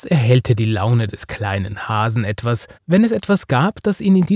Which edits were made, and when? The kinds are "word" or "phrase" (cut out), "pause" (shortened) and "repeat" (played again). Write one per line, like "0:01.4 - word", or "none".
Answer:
0:02.7 - pause